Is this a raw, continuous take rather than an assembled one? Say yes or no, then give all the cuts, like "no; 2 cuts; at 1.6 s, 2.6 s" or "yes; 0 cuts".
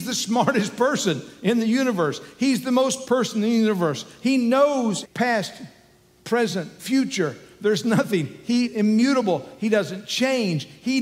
no; 4 cuts; at 3.0 s, 5.0 s, 6.8 s, 8.6 s